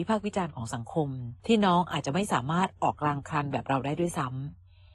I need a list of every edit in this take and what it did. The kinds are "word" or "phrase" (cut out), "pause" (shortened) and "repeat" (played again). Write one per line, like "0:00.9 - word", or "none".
0:01.4 - pause

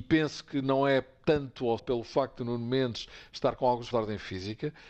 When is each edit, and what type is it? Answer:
0:01.8 - word
0:03.9 - word

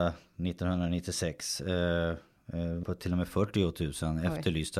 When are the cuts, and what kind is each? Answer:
0:02.8 - word

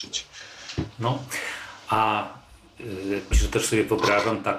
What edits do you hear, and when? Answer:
0:03.3 - word

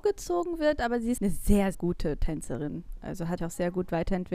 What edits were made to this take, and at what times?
0:01.2 - word
0:01.7 - word
0:03.4 - word

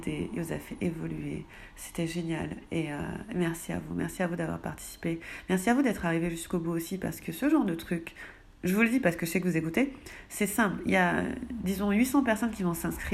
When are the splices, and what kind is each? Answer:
none

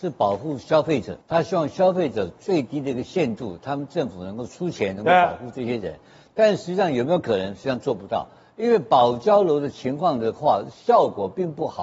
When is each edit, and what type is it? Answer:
0:01.2 - pause

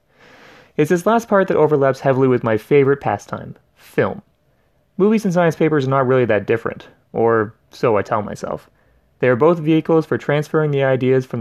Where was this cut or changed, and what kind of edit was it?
none

